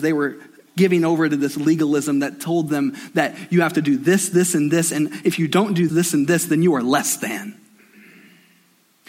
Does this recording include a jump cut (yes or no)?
yes